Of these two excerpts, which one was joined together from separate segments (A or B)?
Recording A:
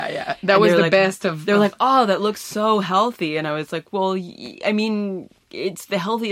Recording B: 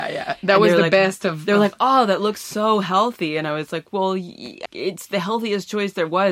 B